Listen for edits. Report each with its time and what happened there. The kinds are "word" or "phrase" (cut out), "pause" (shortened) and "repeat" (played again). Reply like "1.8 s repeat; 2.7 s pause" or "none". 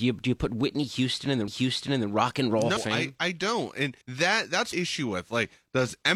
1.5 s repeat; 2.8 s word; 4.0 s pause; 4.7 s phrase